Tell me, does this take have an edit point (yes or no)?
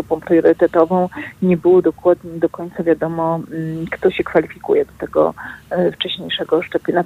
no